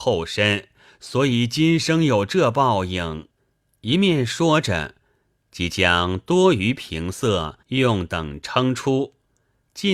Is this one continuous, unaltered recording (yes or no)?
no